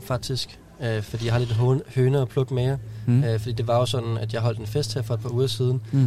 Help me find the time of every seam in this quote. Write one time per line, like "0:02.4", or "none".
none